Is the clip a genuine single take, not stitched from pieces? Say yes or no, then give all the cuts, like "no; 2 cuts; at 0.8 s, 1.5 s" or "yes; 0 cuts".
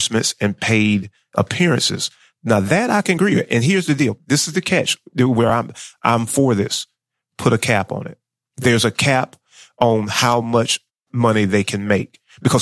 yes; 0 cuts